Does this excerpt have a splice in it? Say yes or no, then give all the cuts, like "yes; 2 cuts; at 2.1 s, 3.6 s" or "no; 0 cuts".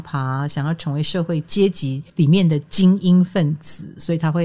yes; 1 cut; at 2.1 s